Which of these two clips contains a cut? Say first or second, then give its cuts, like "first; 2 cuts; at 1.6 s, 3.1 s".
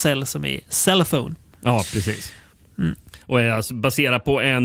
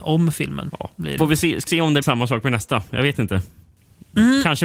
second; 3 cuts; at 1.2 s, 1.7 s, 2.0 s